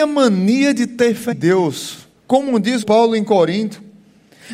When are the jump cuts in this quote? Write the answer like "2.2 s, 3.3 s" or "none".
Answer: 1.3 s, 2.2 s, 2.8 s